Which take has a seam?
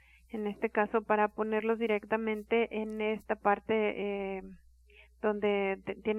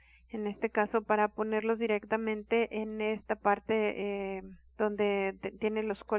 second; 1 cut; at 4.7 s

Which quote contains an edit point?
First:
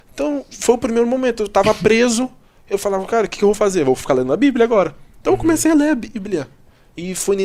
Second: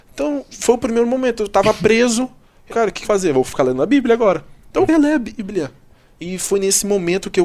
second; 3 cuts; at 2.7 s, 3.0 s, 4.9 s

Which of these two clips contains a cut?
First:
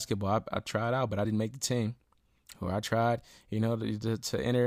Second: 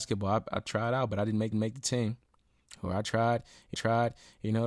second; 2 cuts; at 1.5 s, 3.7 s

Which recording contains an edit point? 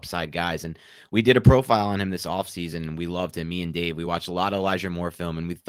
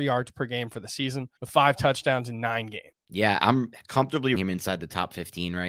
second; 3 cuts; at 1.4 s, 3.4 s, 4.4 s

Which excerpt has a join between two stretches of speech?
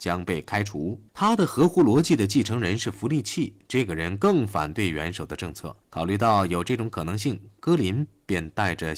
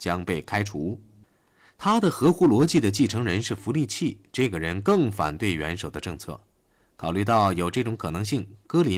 first; 2 cuts; at 1.1 s, 5.8 s

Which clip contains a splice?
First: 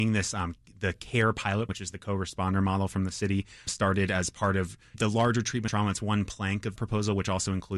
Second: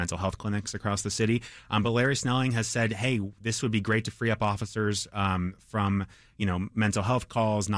first; 5 cuts; at 1.7 s, 3.7 s, 4.9 s, 5.7 s, 6.8 s

